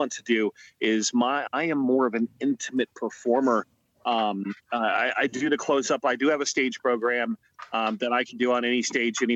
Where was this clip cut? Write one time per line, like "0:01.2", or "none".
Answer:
0:04.6